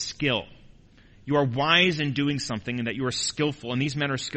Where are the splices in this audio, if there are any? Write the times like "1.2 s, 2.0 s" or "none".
none